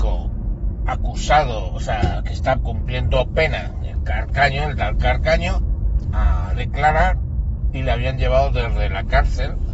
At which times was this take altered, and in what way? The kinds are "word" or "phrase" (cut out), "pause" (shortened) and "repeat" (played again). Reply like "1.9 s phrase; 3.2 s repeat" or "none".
6.0 s word